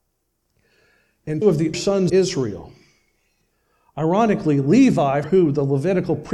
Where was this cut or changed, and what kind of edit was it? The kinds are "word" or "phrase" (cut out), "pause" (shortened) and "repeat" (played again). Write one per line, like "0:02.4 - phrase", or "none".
0:01.4 - word
0:01.7 - word
0:02.1 - word
0:05.2 - word